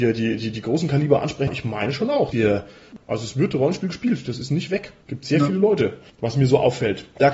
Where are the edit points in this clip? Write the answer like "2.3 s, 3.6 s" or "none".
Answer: 1.5 s, 2.3 s